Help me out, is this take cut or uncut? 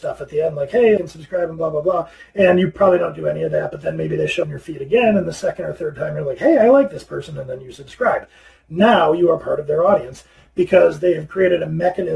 cut